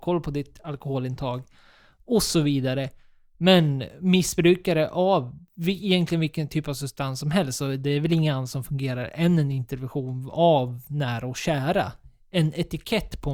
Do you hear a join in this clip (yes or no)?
no